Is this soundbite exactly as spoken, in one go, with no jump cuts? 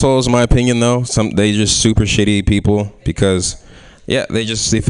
yes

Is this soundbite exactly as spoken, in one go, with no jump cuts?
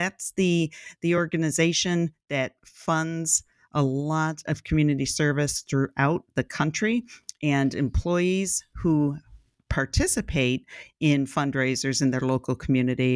yes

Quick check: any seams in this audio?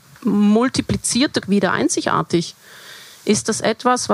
yes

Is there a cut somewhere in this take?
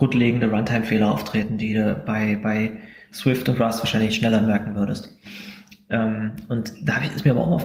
no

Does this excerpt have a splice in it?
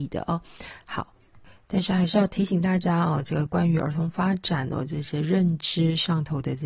no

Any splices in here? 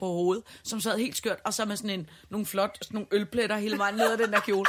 no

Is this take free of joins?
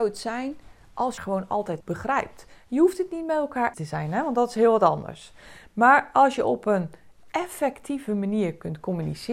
no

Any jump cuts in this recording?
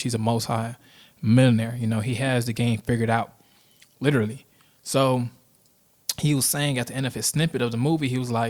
no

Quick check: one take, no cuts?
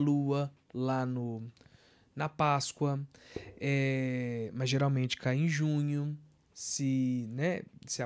yes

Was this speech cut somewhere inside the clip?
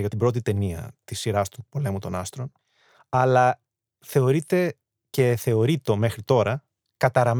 no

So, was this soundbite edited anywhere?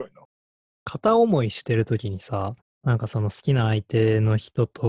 yes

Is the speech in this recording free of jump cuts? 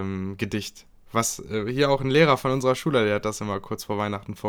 yes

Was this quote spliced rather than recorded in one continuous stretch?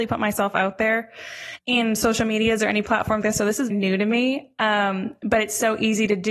yes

